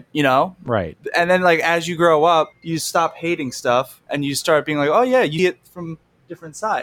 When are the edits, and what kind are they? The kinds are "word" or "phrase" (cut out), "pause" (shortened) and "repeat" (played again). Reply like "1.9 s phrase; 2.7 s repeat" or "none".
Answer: 2.5 s pause; 5.4 s word

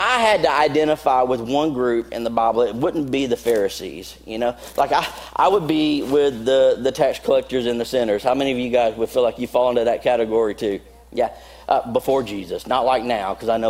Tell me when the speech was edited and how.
none

